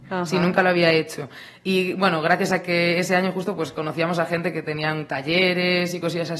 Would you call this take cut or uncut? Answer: uncut